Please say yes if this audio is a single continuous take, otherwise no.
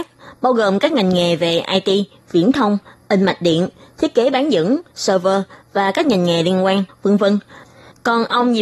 yes